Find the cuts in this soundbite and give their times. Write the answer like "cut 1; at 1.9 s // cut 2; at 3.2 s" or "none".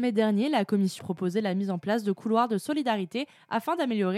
cut 1; at 1.0 s